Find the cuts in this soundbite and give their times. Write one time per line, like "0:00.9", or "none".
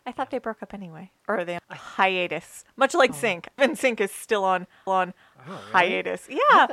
0:01.2
0:01.6
0:03.1
0:03.6
0:04.9